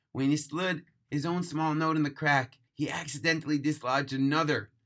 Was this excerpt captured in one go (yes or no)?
no